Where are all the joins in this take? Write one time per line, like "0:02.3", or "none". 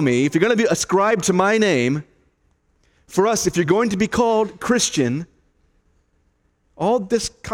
none